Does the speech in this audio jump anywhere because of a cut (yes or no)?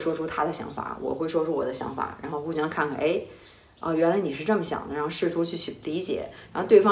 no